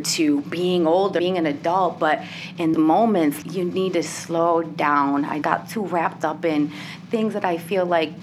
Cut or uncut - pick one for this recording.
cut